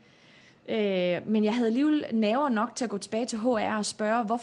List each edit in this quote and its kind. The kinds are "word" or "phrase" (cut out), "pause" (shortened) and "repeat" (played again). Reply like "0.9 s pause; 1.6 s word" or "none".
none